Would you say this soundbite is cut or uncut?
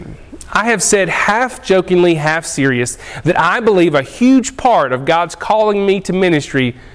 uncut